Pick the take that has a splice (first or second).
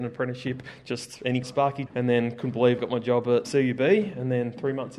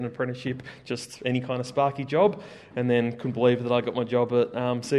first